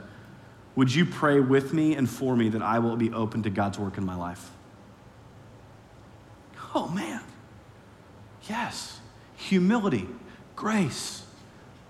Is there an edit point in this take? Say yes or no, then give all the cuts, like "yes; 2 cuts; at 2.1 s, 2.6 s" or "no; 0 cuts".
no; 0 cuts